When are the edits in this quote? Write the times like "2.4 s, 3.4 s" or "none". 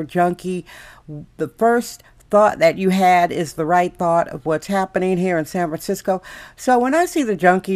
none